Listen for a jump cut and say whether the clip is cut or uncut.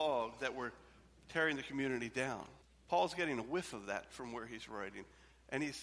cut